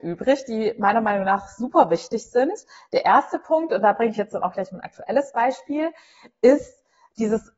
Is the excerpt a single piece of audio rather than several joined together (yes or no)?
yes